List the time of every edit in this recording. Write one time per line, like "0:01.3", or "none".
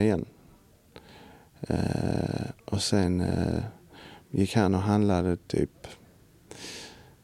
0:04.2